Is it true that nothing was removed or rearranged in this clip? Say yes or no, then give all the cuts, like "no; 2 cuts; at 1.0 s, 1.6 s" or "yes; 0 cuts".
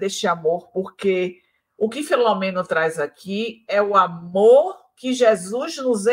yes; 0 cuts